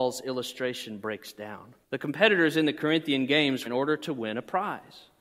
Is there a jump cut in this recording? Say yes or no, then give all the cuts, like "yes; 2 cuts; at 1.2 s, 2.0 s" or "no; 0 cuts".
yes; 2 cuts; at 1.8 s, 3.6 s